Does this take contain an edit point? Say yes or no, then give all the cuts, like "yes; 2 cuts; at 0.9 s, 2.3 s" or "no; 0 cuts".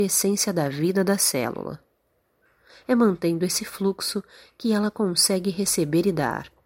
no; 0 cuts